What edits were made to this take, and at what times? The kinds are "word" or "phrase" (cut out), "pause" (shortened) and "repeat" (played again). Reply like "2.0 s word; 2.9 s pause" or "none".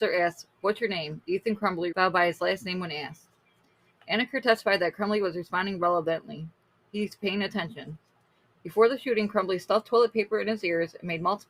1.9 s word